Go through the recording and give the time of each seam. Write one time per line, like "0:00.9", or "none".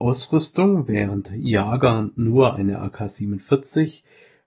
none